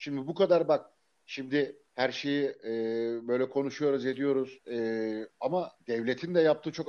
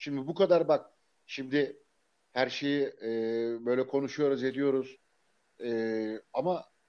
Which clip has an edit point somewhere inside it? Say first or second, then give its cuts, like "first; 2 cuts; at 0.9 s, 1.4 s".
first; 3 cuts; at 1.9 s, 4.6 s, 5.8 s